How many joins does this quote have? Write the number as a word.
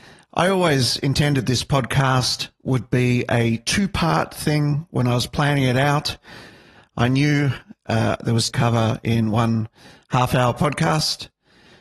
one